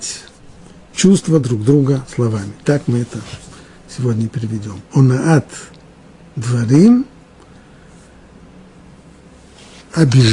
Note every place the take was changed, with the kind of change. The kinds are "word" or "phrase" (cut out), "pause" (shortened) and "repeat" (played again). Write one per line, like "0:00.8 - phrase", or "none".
none